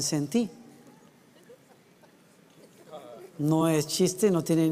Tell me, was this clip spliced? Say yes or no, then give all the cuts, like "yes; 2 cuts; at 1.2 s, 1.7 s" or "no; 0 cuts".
no; 0 cuts